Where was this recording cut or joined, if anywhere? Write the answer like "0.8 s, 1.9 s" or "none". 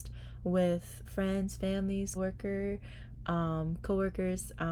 1.0 s, 2.1 s